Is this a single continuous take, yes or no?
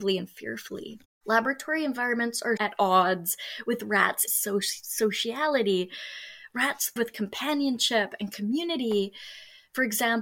no